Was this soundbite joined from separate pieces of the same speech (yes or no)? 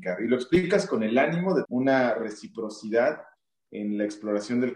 yes